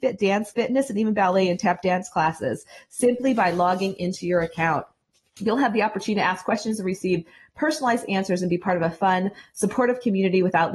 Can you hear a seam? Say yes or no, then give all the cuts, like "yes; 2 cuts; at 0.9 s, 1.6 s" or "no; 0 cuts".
no; 0 cuts